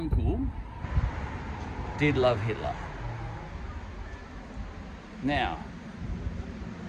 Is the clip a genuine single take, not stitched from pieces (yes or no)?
no